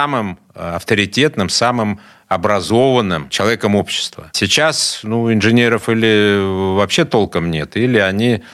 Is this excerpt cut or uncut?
uncut